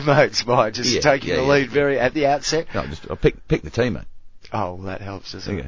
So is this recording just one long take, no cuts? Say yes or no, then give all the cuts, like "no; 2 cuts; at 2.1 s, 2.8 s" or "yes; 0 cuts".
yes; 0 cuts